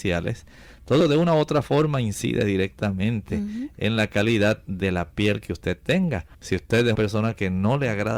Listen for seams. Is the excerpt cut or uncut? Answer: cut